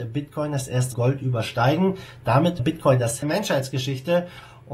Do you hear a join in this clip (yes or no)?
yes